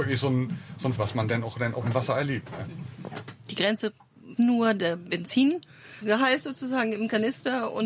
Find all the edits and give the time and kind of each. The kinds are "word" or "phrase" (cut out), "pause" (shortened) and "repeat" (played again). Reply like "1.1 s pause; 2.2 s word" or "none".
0.9 s word; 4.4 s word

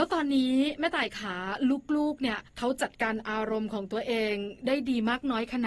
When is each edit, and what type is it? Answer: 2.5 s pause

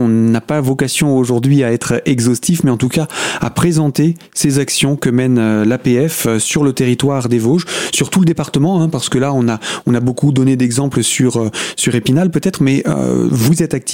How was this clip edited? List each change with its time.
none

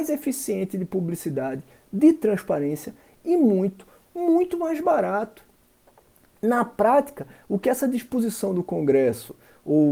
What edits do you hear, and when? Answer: none

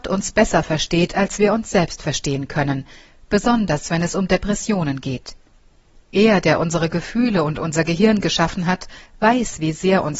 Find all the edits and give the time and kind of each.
none

